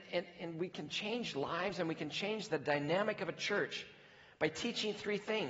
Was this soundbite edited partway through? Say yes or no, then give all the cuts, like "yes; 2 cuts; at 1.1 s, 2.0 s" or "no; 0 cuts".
yes; 1 cut; at 2.5 s